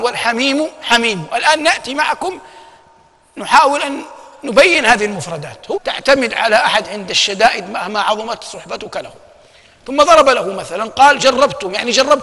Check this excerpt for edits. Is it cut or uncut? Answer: cut